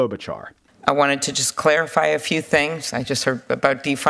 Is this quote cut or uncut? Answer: uncut